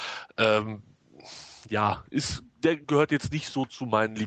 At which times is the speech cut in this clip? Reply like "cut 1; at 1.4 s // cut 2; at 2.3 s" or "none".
cut 1; at 2.8 s